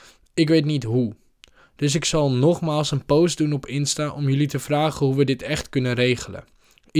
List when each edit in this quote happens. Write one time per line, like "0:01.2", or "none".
none